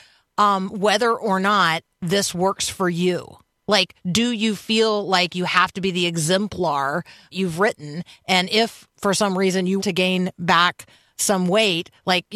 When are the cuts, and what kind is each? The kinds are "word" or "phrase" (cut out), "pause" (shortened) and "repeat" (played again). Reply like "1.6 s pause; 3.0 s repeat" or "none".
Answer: 3.5 s pause; 7.3 s phrase; 8.9 s word; 9.8 s word